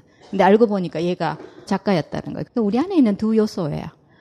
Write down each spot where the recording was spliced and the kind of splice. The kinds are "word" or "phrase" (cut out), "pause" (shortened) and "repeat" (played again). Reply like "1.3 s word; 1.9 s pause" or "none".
1.7 s word